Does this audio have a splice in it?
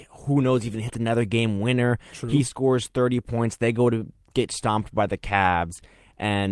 no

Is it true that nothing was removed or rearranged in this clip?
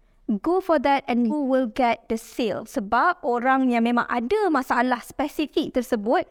no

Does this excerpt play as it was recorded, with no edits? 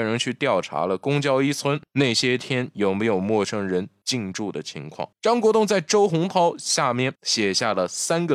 no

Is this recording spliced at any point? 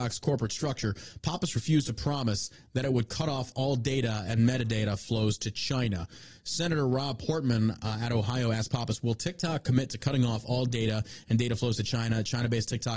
no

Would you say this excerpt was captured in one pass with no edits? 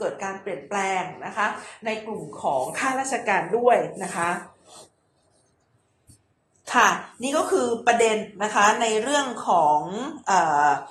yes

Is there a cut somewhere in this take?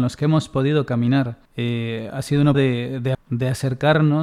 yes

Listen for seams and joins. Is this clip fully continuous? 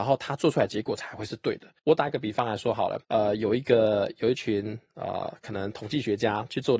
no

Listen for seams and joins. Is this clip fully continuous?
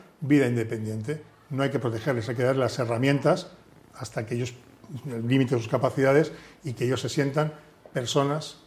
yes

